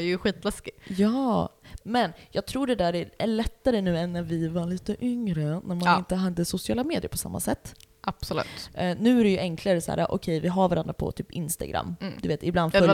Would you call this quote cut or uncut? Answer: uncut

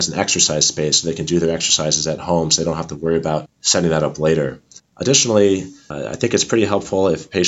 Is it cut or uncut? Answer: uncut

